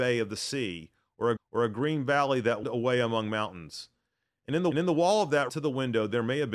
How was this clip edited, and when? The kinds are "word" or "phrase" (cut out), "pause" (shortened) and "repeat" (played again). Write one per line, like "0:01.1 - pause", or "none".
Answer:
0:01.4 - repeat
0:02.6 - word
0:04.7 - repeat
0:05.5 - phrase